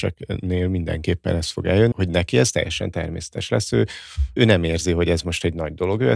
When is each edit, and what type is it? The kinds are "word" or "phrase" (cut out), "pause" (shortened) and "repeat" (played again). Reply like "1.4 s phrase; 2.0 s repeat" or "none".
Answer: 1.9 s word; 4.4 s word